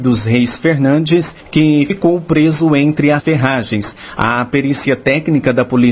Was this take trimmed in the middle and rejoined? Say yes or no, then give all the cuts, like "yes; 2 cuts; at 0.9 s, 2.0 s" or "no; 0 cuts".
no; 0 cuts